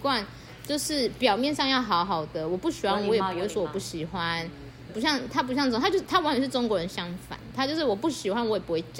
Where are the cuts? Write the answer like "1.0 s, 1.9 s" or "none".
4.9 s